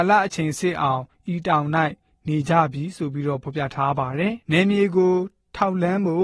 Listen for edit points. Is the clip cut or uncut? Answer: cut